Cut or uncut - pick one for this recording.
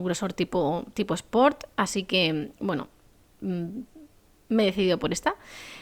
uncut